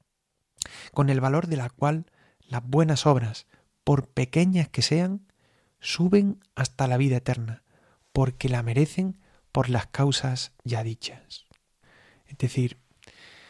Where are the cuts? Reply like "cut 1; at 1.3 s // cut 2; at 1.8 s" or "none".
none